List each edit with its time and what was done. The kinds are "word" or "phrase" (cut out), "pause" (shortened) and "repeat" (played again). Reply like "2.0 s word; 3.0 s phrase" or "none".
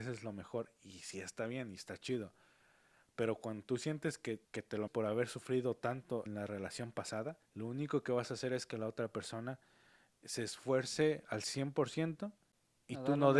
4.4 s pause; 4.9 s word; 6.3 s word; 7.5 s pause